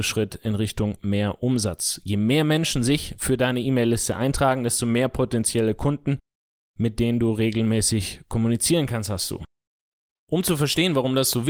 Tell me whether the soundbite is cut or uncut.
uncut